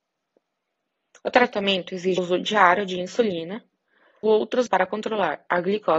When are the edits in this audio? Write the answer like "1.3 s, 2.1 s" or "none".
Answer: 2.2 s, 4.2 s, 4.7 s